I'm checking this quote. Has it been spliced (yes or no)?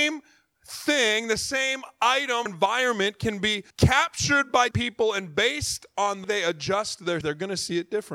yes